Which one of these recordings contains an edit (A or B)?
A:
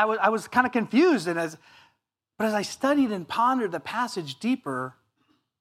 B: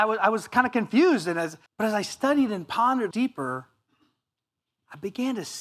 B